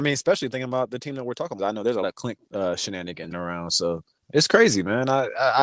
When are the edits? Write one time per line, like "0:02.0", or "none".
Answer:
0:01.6
0:02.0
0:02.4
0:03.3
0:04.2